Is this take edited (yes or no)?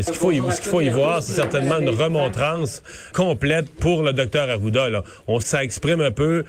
yes